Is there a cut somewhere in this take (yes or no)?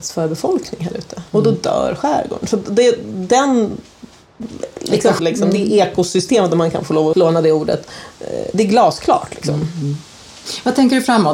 yes